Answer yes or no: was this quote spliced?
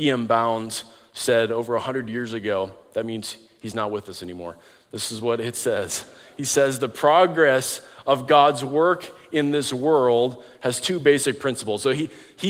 no